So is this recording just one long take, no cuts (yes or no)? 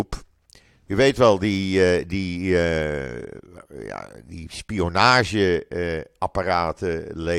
yes